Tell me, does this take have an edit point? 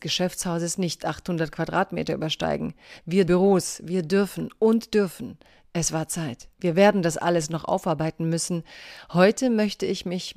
yes; 2 cuts; at 3.3 s, 6.5 s

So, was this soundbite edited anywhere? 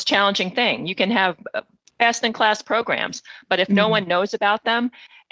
yes; 1 cut; at 1.8 s

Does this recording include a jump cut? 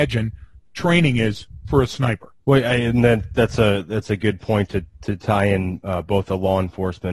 yes; 1 cut; at 2.4 s

